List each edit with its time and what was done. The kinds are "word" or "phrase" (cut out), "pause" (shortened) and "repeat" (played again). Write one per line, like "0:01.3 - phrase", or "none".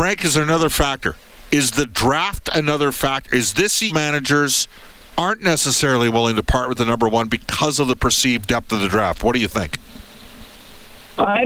0:03.9 - phrase